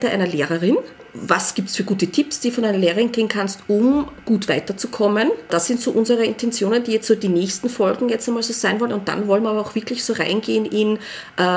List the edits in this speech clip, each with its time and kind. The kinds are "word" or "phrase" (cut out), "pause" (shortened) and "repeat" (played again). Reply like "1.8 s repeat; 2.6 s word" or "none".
none